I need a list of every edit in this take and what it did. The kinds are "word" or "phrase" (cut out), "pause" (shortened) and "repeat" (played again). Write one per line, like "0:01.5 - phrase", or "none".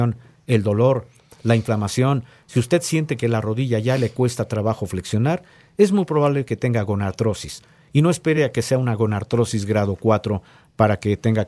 none